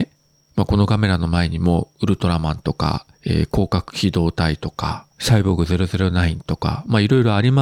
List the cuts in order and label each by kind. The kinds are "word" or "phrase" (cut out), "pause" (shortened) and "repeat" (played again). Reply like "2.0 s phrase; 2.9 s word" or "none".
3.1 s pause; 5.1 s pause